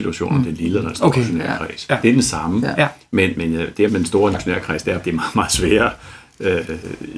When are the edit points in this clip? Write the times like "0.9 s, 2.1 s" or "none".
2.0 s, 3.3 s, 3.9 s, 4.3 s, 5.0 s